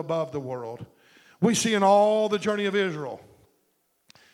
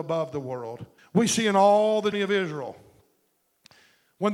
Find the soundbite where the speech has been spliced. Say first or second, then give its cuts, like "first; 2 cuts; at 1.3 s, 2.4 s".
second; 2 cuts; at 1.0 s, 2.1 s